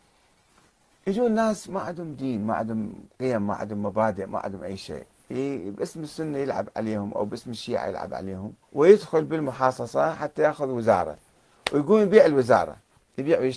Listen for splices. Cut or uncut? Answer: cut